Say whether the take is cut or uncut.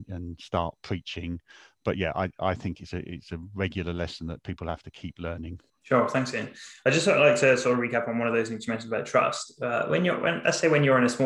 cut